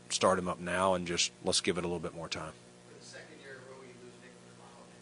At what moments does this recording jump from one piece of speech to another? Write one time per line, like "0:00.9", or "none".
0:01.4